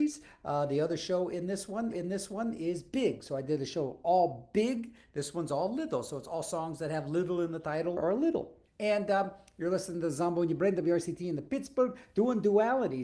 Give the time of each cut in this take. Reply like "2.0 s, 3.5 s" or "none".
1.9 s, 8.0 s, 8.7 s